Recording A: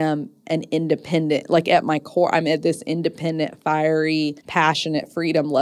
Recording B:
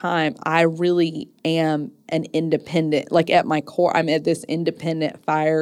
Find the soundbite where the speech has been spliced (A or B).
A